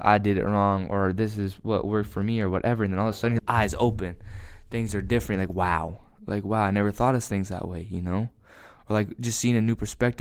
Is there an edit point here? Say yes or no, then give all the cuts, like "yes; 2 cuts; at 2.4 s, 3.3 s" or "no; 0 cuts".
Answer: yes; 1 cut; at 3.4 s